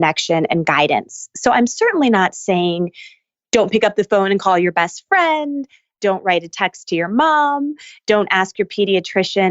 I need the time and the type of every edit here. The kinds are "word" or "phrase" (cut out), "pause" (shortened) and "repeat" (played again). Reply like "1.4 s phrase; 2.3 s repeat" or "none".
none